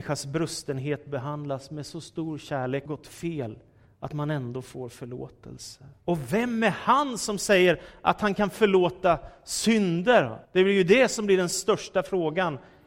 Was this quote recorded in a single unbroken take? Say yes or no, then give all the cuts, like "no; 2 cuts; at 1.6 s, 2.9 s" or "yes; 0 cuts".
no; 3 cuts; at 2.9 s, 6.0 s, 10.4 s